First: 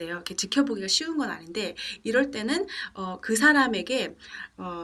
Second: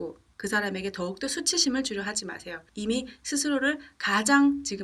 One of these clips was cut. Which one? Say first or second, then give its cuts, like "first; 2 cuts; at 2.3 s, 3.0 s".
second; 1 cut; at 2.7 s